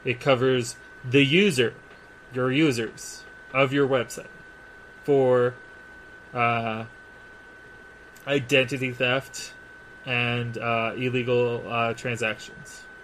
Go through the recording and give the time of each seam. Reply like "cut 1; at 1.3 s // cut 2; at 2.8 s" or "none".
none